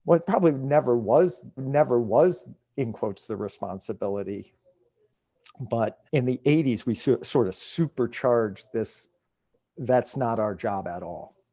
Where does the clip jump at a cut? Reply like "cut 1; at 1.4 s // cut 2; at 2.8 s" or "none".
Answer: cut 1; at 1.6 s // cut 2; at 6.1 s